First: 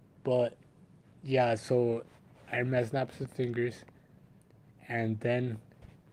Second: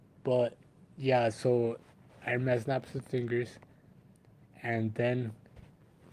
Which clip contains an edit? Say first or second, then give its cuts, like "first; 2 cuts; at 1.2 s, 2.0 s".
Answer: second; 1 cut; at 0.9 s